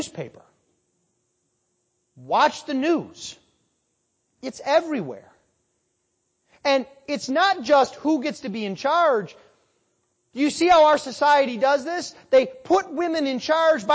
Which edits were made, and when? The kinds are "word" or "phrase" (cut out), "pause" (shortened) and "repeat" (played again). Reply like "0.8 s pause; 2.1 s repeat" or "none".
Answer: none